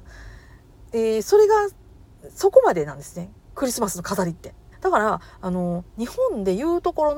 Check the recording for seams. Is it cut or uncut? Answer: cut